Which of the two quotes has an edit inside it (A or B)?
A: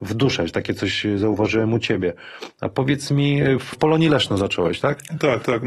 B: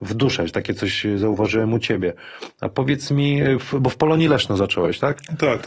A